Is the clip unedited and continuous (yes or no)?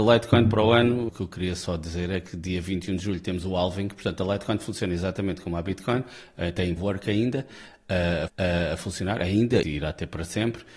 no